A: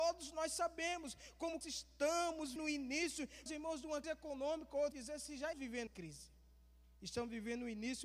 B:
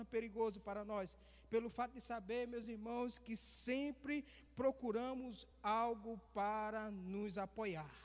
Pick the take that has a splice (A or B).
A